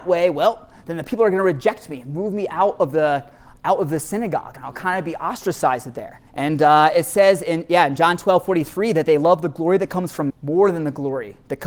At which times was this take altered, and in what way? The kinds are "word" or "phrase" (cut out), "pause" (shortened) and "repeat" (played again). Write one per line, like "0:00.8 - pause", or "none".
0:06.3 - pause
0:10.3 - word